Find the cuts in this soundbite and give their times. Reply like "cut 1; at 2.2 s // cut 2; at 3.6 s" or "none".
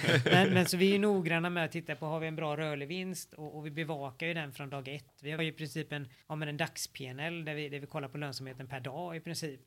cut 1; at 5.4 s // cut 2; at 6.2 s